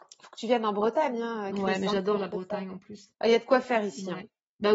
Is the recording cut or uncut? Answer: cut